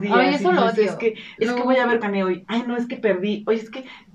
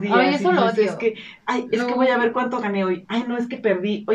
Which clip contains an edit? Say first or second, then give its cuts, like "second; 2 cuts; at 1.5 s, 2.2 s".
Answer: first; 2 cuts; at 1.4 s, 2.0 s